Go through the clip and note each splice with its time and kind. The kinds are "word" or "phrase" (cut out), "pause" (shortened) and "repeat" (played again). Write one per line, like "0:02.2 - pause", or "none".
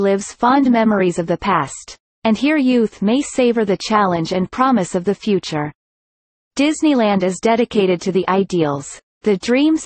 none